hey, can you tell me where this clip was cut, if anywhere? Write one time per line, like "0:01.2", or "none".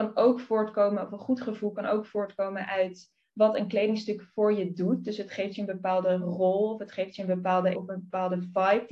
0:07.7